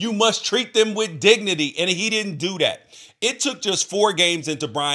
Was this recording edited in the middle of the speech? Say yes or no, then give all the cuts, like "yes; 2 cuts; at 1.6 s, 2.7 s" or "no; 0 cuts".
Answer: no; 0 cuts